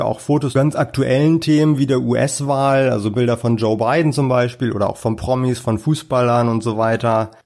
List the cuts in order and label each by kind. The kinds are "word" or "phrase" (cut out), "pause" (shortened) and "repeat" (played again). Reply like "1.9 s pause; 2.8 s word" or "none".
none